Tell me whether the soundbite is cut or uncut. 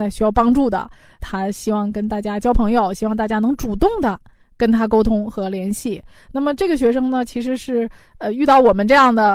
cut